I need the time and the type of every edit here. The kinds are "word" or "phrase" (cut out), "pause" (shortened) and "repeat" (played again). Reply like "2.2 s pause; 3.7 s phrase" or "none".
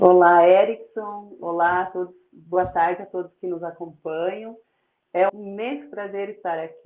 5.3 s word